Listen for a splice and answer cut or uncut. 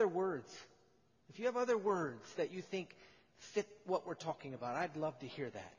uncut